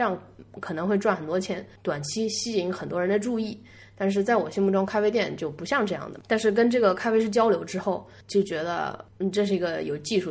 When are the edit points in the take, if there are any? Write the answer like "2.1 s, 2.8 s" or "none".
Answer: none